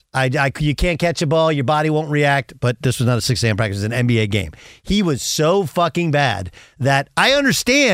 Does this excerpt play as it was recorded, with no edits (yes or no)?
yes